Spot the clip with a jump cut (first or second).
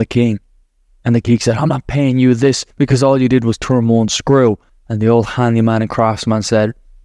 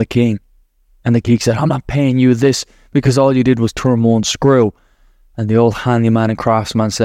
first